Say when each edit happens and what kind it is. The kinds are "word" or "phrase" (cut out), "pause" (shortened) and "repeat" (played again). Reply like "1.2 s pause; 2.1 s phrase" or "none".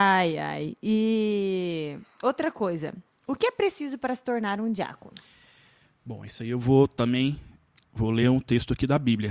none